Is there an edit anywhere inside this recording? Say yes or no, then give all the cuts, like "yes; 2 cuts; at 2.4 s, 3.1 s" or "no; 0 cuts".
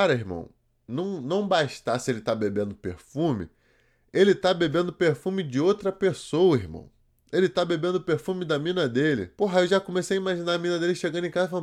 yes; 1 cut; at 9.3 s